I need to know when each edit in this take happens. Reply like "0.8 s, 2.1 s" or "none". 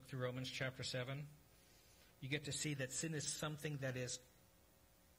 2.1 s